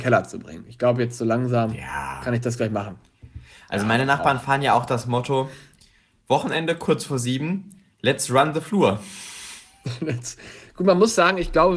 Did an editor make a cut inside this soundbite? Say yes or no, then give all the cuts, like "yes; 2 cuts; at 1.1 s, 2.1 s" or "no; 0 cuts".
no; 0 cuts